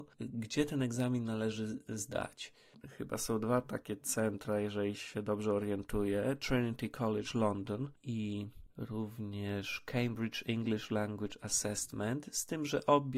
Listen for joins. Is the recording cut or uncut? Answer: uncut